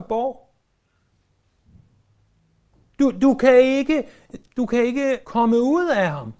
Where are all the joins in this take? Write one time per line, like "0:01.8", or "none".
0:04.5
0:05.2